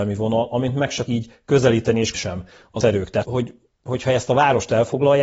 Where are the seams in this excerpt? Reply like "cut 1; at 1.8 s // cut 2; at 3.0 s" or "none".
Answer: cut 1; at 1.1 s // cut 2; at 2.1 s // cut 3; at 2.8 s // cut 4; at 3.2 s